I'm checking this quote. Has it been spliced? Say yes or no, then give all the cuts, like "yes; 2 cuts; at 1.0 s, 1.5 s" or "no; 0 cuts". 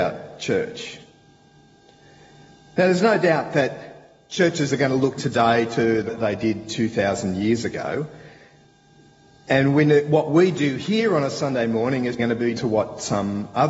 yes; 4 cuts; at 5.2 s, 6.1 s, 12.2 s, 12.6 s